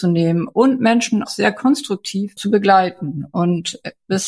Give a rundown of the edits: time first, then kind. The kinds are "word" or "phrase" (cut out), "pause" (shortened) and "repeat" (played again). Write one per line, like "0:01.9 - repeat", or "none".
0:01.3 - word